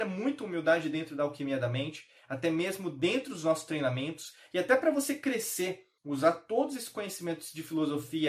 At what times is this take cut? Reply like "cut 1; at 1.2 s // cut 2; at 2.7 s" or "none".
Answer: cut 1; at 6.0 s